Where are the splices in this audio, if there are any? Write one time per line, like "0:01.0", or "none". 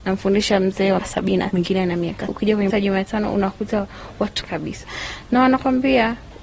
0:01.0
0:01.5
0:02.3
0:02.7
0:04.4